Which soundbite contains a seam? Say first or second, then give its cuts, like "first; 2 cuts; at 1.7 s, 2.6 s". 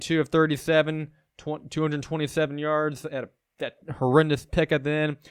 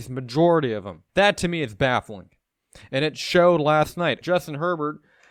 second; 2 cuts; at 1.1 s, 4.2 s